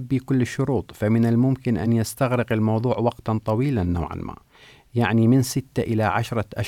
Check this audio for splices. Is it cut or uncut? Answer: uncut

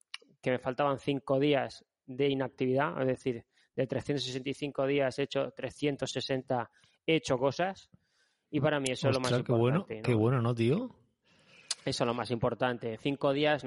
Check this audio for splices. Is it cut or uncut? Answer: uncut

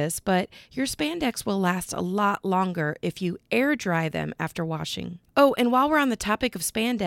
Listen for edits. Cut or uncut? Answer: cut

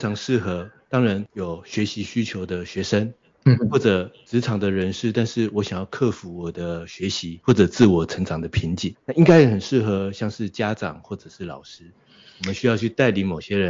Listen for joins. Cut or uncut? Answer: uncut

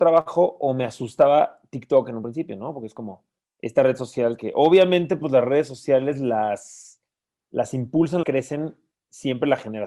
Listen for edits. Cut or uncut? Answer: cut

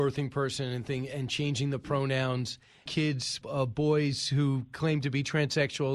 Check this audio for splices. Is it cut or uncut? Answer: cut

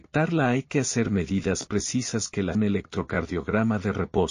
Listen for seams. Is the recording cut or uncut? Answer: cut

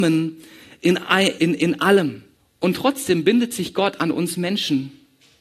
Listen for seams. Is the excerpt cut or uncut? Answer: cut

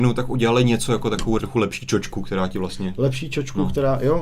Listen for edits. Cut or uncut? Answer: cut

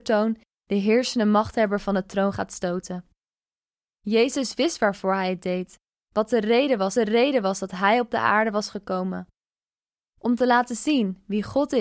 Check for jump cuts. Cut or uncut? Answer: cut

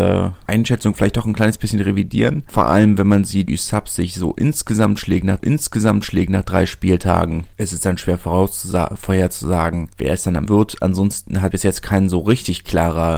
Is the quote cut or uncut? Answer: cut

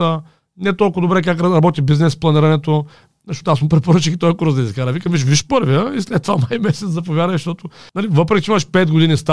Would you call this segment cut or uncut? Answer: uncut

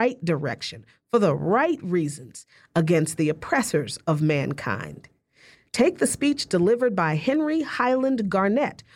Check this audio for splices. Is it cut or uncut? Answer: uncut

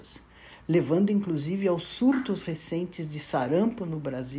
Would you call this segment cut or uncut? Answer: uncut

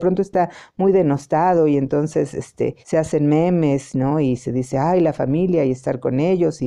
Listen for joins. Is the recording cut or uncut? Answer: cut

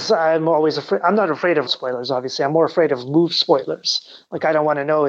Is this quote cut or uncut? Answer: cut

